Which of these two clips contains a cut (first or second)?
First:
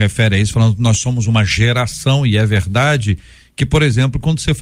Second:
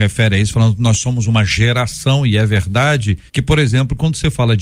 second